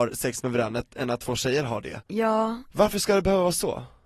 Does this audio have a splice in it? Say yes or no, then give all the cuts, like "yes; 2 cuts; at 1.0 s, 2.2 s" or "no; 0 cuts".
yes; 1 cut; at 2.1 s